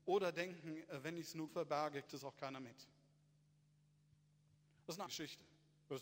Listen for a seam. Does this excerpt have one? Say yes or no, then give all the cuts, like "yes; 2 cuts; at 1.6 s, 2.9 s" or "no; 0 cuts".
yes; 3 cuts; at 1.5 s, 2.1 s, 5.1 s